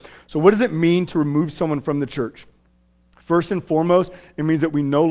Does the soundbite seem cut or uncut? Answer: uncut